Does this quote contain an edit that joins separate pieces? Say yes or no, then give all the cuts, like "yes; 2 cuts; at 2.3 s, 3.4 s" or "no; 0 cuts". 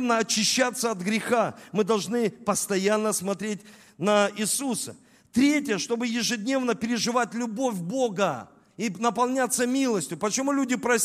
no; 0 cuts